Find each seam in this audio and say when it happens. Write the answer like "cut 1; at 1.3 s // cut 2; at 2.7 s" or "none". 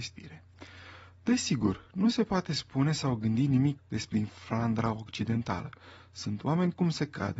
cut 1; at 3.8 s // cut 2; at 4.1 s